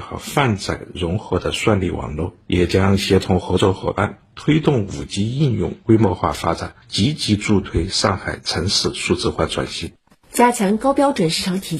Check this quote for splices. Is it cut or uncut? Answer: uncut